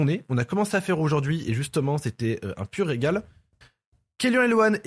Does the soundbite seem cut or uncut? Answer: uncut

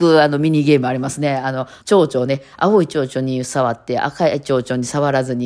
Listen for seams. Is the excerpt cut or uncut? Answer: cut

